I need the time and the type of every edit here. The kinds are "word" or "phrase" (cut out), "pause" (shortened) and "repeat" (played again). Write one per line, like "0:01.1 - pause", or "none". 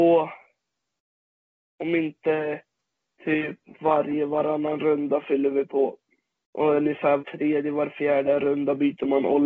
0:07.2 - word